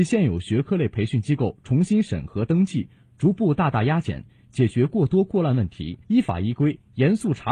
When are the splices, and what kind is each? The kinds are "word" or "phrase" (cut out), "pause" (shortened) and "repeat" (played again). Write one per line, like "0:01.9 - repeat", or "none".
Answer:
0:06.0 - pause